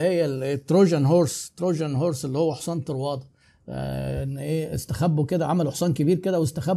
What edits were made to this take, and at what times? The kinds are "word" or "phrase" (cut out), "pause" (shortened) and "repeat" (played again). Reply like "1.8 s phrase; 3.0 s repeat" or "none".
none

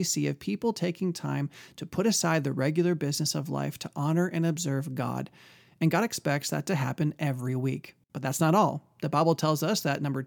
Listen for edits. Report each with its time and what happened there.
8.0 s pause

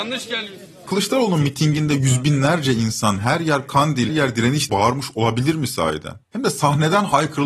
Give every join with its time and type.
4.1 s word; 4.7 s word; 6.2 s pause

